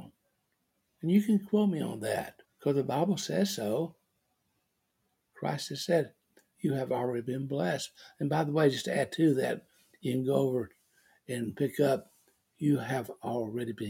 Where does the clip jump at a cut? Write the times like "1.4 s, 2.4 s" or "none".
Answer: 2.4 s